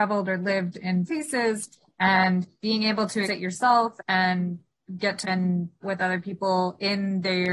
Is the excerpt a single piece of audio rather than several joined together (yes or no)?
no